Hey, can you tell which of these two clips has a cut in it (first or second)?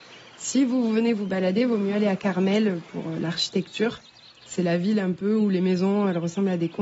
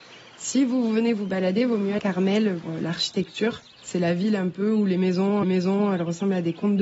second